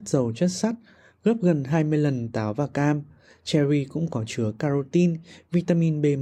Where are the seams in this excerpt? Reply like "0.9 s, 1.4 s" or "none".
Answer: none